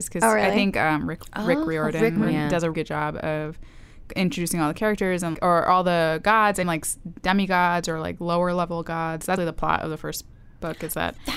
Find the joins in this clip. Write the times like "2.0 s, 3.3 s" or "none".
2.2 s, 2.7 s, 5.3 s, 6.6 s, 7.2 s, 9.4 s